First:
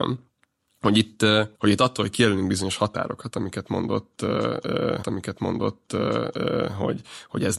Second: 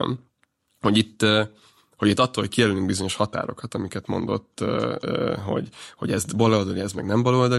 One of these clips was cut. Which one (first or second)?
first